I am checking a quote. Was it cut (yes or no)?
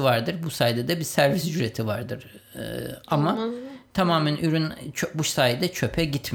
no